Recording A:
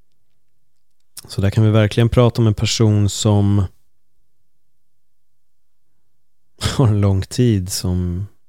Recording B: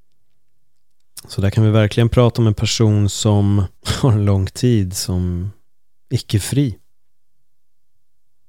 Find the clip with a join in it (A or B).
B